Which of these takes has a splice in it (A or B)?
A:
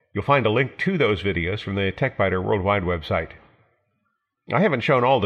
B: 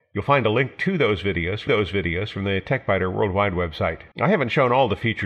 B